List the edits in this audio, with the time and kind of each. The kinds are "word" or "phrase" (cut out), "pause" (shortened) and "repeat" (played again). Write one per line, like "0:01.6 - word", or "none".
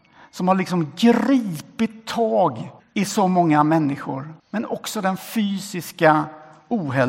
0:02.8 - pause
0:04.4 - pause

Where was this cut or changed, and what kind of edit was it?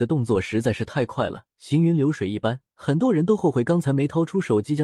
0:01.5 - pause
0:02.7 - pause

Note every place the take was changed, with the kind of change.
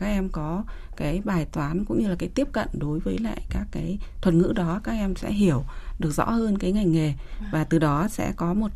none

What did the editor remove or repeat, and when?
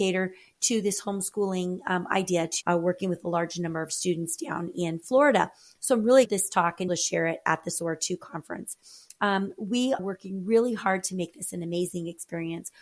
0:02.6 - word
0:06.3 - phrase
0:06.9 - phrase
0:10.0 - word

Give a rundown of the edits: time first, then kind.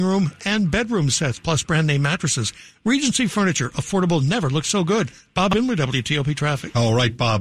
none

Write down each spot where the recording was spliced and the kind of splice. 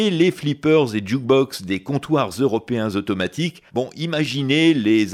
0:03.7 - pause

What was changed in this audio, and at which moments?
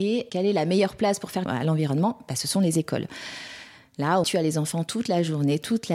0:01.5 - word
0:04.2 - word

